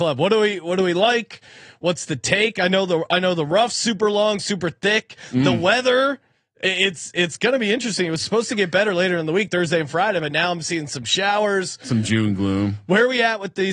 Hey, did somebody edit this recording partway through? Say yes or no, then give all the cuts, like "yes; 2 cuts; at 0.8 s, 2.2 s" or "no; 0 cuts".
no; 0 cuts